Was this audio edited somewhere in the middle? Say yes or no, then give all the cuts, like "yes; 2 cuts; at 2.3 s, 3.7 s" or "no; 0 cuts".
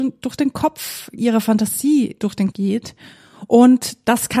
yes; 2 cuts; at 1.2 s, 2.5 s